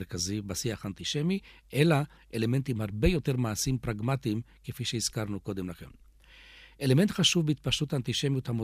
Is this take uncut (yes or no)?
yes